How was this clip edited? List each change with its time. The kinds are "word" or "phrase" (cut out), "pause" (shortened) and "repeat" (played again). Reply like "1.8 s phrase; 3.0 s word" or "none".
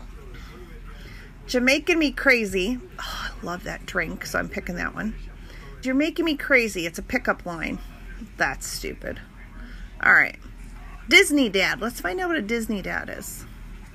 5.8 s word